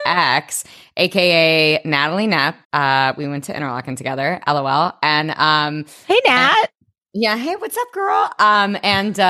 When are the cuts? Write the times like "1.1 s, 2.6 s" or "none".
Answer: 2.6 s